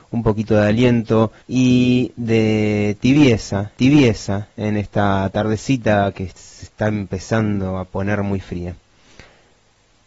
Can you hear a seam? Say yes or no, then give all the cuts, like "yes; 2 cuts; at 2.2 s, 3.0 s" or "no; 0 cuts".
yes; 2 cuts; at 1.4 s, 3.8 s